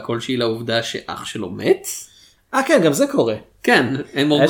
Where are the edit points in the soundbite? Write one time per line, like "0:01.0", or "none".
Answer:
none